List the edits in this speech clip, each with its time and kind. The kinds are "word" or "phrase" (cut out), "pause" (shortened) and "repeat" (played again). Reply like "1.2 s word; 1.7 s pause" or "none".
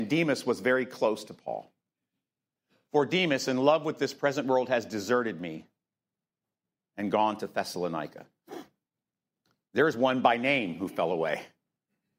none